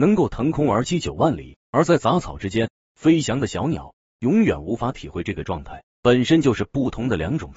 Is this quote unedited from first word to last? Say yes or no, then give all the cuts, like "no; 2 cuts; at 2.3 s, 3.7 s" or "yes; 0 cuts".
no; 2 cuts; at 1.6 s, 5.9 s